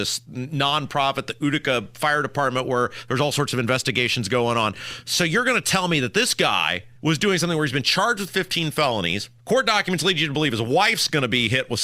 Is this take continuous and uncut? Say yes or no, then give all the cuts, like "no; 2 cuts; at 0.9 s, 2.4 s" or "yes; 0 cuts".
no; 2 cuts; at 7.0 s, 9.4 s